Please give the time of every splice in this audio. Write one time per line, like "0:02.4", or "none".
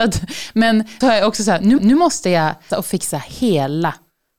0:01.0
0:01.8
0:02.7